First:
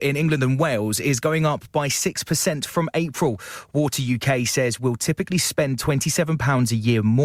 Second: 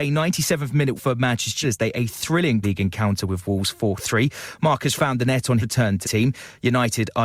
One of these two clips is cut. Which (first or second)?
second